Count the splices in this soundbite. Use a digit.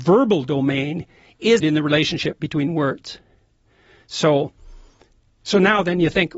1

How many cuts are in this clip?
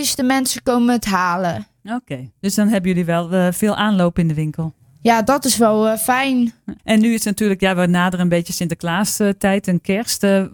2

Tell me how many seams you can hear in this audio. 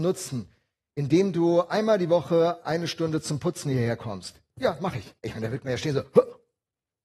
1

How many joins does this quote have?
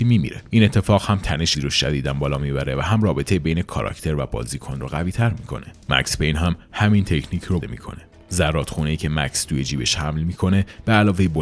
2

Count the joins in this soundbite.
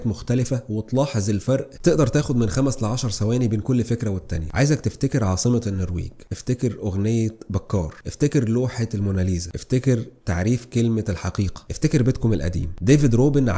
1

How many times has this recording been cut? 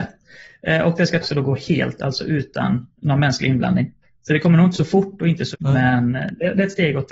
6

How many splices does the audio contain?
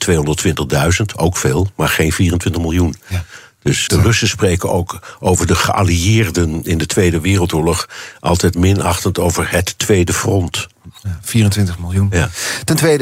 3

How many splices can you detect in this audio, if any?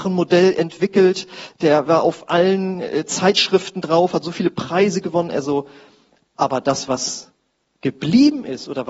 0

